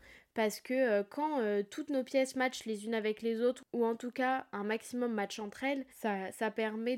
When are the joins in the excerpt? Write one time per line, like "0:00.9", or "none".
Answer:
0:05.9

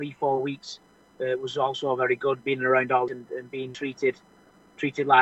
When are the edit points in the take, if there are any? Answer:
0:03.1

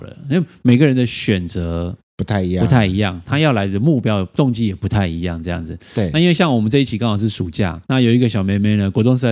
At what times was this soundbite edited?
0:07.8

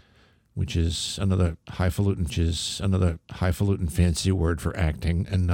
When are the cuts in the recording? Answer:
0:02.3

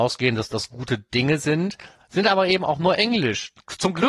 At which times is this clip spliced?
none

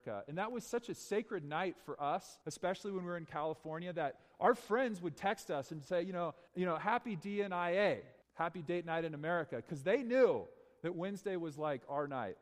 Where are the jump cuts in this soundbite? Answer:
0:02.4
0:06.5
0:08.2

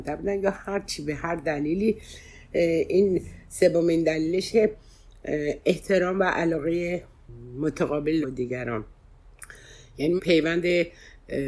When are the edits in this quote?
0:04.5
0:08.2
0:10.2

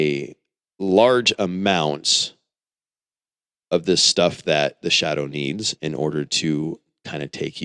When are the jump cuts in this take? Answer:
none

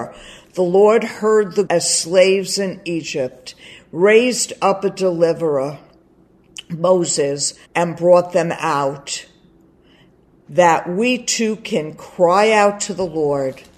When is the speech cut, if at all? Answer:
0:01.7
0:07.6

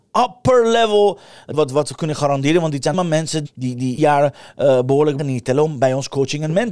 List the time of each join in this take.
0:01.5
0:02.9
0:03.4
0:04.0
0:05.2

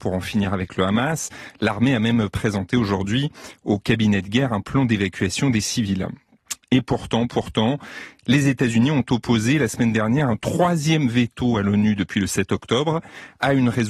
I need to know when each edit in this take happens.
none

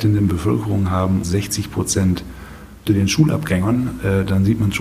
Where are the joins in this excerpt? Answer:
0:01.2
0:02.9

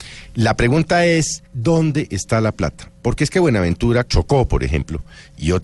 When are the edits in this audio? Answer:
0:01.5
0:04.1

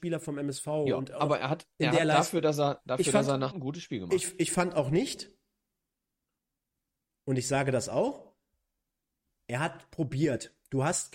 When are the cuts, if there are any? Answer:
0:03.5

